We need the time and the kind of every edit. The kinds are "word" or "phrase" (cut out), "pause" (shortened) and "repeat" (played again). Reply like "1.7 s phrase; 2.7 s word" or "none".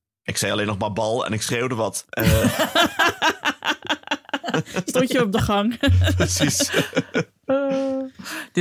none